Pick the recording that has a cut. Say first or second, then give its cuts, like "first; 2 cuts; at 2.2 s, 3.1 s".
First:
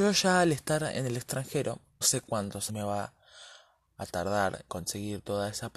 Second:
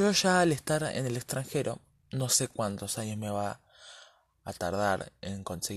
first; 3 cuts; at 2.0 s, 2.7 s, 4.7 s